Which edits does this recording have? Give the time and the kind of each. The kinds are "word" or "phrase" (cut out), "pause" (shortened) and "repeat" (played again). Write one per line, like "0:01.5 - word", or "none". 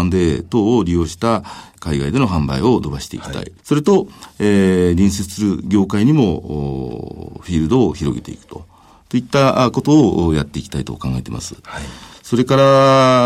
0:03.6 - pause